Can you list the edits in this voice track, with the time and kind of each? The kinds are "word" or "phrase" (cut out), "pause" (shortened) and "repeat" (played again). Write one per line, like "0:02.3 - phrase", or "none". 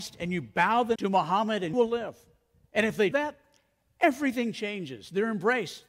0:01.0 - word
0:01.7 - word
0:03.1 - word